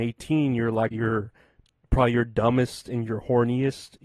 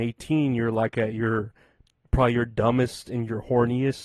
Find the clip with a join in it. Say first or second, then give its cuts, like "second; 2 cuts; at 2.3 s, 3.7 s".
first; 1 cut; at 0.9 s